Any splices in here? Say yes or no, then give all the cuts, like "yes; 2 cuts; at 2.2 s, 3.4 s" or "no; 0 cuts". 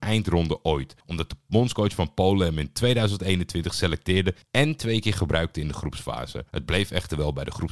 yes; 3 cuts; at 1.0 s, 4.4 s, 6.5 s